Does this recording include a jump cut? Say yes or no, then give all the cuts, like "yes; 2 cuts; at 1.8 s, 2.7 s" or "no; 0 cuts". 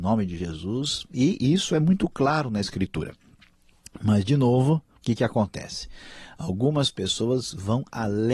no; 0 cuts